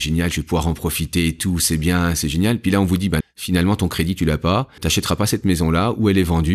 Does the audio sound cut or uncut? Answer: cut